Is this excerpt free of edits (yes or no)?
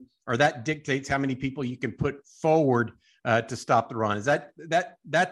yes